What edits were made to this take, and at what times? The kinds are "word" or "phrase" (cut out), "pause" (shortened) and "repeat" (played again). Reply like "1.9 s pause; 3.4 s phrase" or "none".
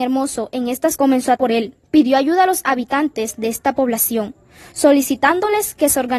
1.0 s word; 1.4 s word; 1.8 s pause

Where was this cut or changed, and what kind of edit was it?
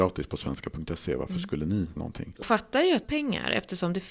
2.0 s word; 2.4 s word; 3.0 s phrase

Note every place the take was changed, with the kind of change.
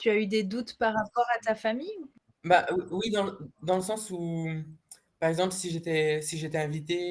none

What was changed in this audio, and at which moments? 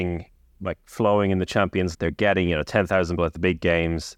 1.9 s word; 3.2 s word

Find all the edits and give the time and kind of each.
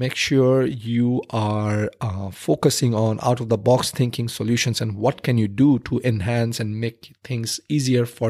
none

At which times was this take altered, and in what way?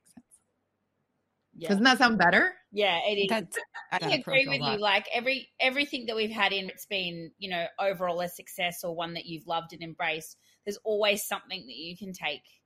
4.0 s word; 6.7 s word

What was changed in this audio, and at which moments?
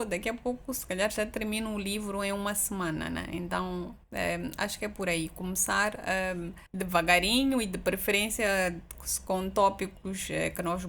4.0 s pause; 6.7 s pause

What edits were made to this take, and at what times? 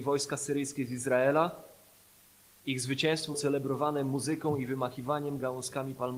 3.3 s word

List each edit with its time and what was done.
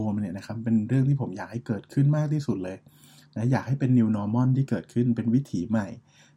none

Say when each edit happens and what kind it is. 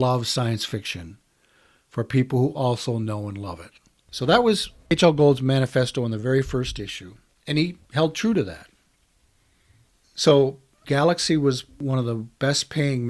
none

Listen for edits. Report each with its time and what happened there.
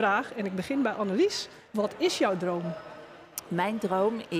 1.7 s pause

